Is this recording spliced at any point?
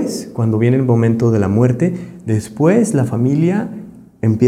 no; 0 cuts

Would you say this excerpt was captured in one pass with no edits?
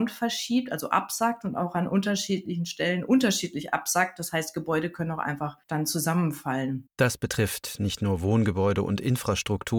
no; 2 cuts; at 5.6 s, 6.9 s

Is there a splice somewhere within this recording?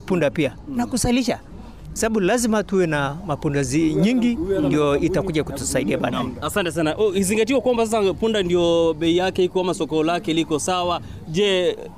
no; 0 cuts

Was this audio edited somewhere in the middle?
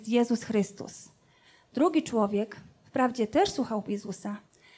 no; 0 cuts

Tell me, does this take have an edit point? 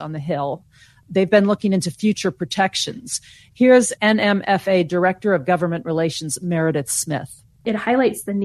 no; 0 cuts

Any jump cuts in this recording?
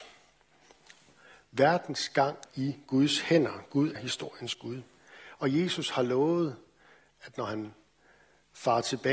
yes; 2 cuts; at 2.5 s, 4.0 s

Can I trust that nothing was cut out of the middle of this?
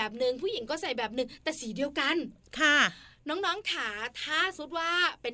yes; 0 cuts

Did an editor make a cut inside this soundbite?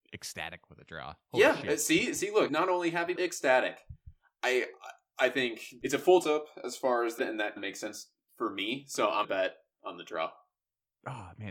yes; 8 cuts; at 2.5 s, 3.2 s, 5.8 s, 6.2 s, 7.2 s, 7.6 s, 9.2 s, 9.7 s

